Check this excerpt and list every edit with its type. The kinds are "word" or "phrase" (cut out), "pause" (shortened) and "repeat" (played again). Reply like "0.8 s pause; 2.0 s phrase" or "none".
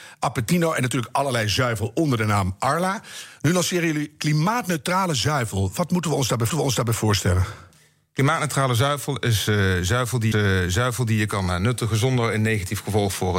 6.5 s repeat; 10.3 s repeat